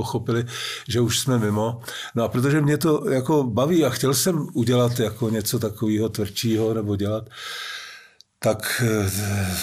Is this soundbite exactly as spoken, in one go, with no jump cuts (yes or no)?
yes